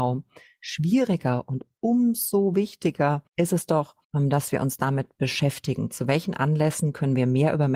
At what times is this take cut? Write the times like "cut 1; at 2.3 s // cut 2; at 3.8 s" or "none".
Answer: cut 1; at 3.3 s // cut 2; at 4.0 s